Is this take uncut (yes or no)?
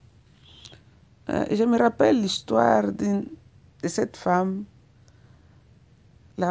yes